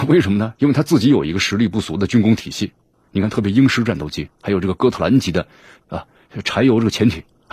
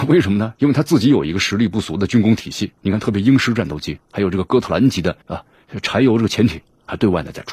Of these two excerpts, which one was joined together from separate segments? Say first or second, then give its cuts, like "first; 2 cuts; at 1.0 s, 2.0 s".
second; 2 cuts; at 2.8 s, 5.2 s